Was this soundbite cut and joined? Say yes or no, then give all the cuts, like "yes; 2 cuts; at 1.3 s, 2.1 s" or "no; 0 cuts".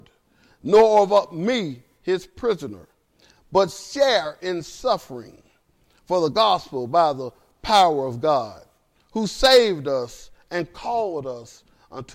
no; 0 cuts